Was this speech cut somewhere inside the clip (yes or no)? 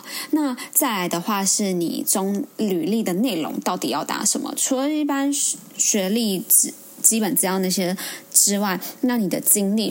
yes